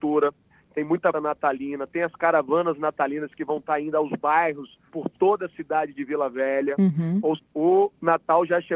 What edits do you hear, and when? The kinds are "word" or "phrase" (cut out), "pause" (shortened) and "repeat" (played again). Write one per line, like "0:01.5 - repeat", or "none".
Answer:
0:01.1 - word
0:04.9 - pause
0:07.4 - word

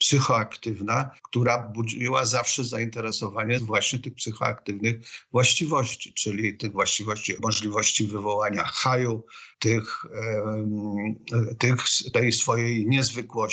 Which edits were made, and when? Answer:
0:01.2 - pause
0:03.6 - phrase
0:07.4 - phrase
0:09.5 - pause

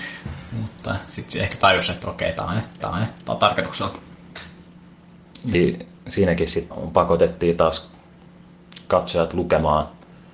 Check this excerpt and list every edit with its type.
0:02.8 - repeat
0:05.5 - word
0:06.7 - word

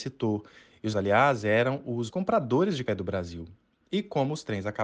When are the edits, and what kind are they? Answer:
0:00.9 - word
0:02.1 - word
0:02.9 - word

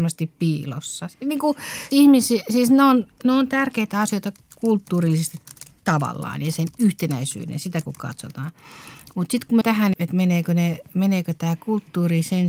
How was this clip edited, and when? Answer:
0:01.9 - word
0:09.6 - word
0:09.9 - word

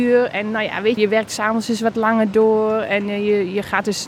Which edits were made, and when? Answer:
0:01.0 - word

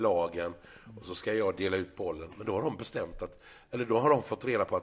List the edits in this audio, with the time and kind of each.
none

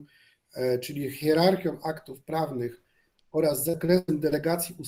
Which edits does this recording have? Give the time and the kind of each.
none

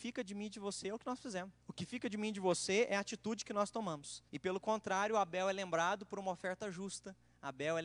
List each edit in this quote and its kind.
0:01.6 - pause
0:04.3 - pause

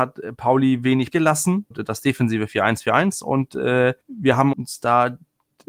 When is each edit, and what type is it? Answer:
0:01.1 - word
0:01.7 - word
0:04.0 - pause
0:04.5 - word

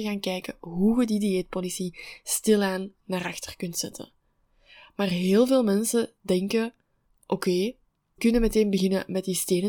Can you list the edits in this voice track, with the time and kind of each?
0:08.2 - word

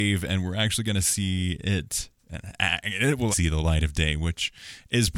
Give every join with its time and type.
0:02.2 - pause
0:03.3 - word

